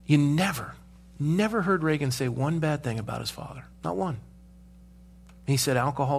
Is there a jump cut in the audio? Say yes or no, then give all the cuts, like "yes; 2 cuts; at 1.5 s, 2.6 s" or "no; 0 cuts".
yes; 1 cut; at 3.7 s